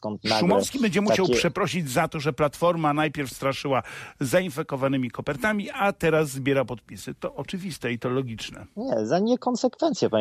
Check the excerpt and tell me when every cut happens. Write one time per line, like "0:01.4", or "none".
none

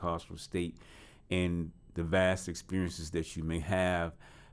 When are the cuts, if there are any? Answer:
none

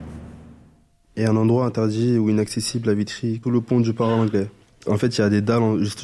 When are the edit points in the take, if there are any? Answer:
0:03.4

